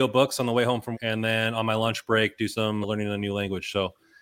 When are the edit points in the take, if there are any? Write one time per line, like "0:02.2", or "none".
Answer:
0:00.9
0:02.8